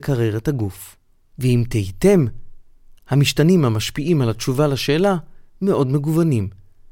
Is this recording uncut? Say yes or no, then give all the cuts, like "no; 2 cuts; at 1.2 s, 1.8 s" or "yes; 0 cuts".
yes; 0 cuts